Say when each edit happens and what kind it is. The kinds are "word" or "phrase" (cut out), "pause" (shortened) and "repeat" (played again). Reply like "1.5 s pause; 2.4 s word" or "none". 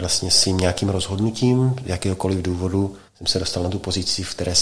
3.1 s pause